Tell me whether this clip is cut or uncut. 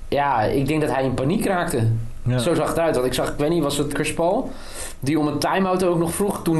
cut